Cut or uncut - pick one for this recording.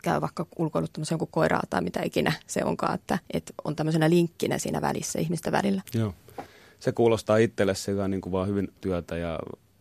cut